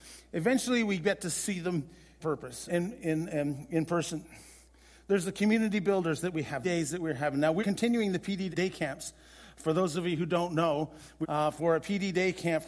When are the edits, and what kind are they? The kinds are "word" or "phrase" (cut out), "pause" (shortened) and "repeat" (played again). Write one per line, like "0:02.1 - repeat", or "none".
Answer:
0:02.2 - word
0:02.7 - word
0:06.6 - phrase
0:07.6 - word
0:08.5 - word
0:11.2 - phrase